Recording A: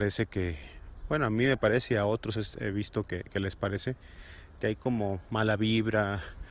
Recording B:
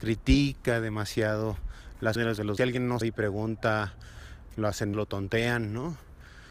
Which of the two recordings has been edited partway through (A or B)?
B